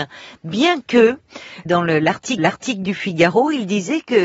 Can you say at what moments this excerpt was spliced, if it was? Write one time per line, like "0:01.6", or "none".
0:01.7
0:02.4